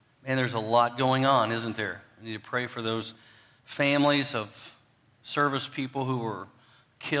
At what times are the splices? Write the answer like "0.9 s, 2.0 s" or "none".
none